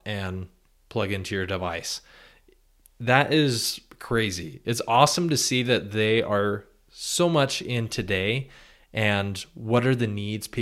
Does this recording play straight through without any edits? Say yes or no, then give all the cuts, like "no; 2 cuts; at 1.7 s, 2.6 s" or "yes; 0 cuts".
yes; 0 cuts